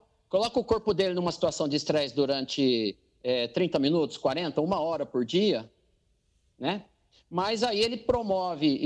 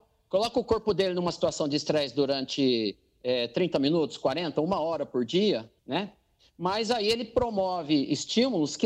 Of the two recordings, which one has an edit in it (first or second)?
second